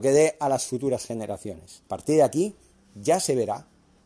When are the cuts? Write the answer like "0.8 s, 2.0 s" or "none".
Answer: 1.9 s